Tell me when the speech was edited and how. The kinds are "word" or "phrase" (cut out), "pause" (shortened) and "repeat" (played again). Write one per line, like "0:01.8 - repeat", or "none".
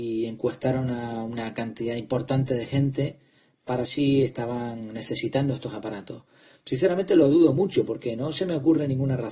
0:03.8 - word